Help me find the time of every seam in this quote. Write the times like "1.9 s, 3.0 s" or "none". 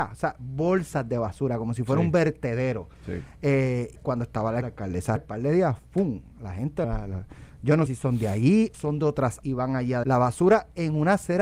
3.9 s, 4.6 s, 5.2 s, 6.8 s, 7.9 s, 8.7 s, 9.4 s, 10.0 s